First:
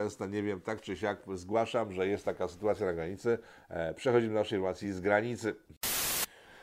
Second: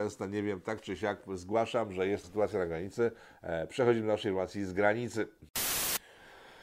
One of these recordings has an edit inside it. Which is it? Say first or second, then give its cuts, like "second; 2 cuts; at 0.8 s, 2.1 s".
second; 1 cut; at 2.2 s